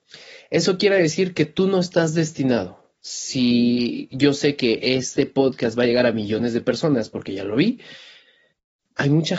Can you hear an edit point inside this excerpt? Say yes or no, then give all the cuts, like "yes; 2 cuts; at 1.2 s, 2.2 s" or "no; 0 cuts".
no; 0 cuts